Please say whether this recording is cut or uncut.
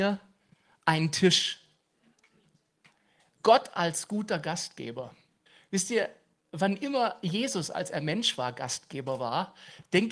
cut